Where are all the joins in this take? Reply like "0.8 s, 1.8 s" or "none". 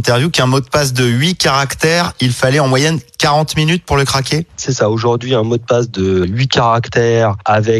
4.5 s